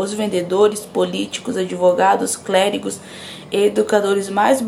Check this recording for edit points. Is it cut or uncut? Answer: uncut